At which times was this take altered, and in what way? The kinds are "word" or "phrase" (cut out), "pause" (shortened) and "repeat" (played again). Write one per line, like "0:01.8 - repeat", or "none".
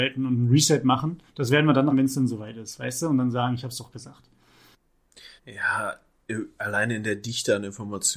0:01.3 - pause
0:01.9 - word
0:05.4 - pause